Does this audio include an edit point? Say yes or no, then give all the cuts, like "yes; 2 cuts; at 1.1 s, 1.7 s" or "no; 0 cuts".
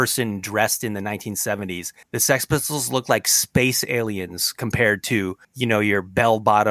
yes; 2 cuts; at 2.0 s, 5.4 s